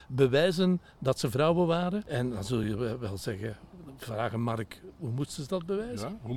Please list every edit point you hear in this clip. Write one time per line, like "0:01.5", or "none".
none